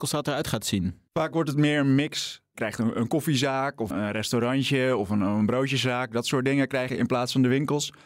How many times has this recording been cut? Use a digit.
3